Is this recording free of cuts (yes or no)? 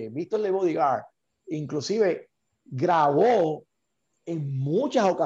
yes